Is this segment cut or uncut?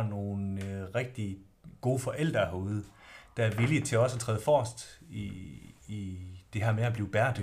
cut